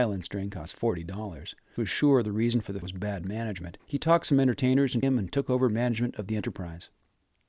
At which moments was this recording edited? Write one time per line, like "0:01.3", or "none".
0:01.8
0:02.8
0:03.8
0:05.0